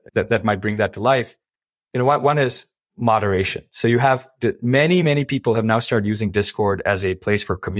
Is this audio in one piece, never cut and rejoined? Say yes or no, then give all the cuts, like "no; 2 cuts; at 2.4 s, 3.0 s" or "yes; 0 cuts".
yes; 0 cuts